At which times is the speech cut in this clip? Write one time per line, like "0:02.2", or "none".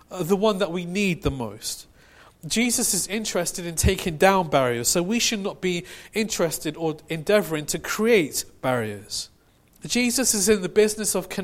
0:09.5

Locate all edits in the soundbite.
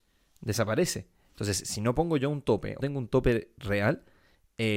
0:02.8

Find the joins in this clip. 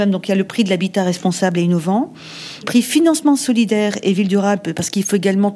0:02.6

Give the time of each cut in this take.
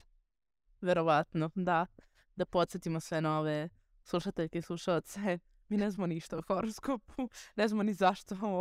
none

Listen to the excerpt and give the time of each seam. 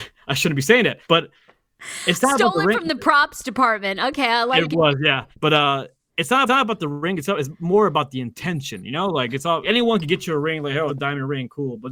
0:01.0
0:04.7
0:05.3
0:06.5
0:09.6
0:10.9

